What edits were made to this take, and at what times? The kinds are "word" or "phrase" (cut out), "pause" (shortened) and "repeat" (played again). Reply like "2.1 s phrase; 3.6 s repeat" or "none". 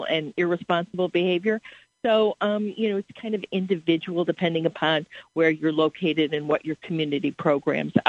none